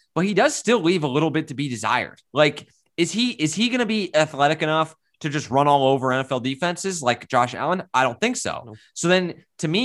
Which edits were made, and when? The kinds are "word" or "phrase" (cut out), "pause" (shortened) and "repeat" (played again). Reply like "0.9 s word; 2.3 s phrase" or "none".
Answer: 2.3 s pause